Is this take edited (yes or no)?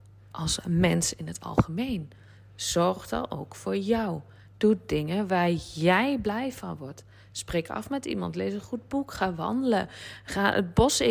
no